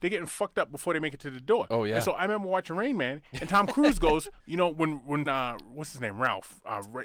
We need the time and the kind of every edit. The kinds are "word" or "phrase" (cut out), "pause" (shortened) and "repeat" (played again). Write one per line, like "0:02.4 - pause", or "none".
0:04.4 - pause
0:05.3 - word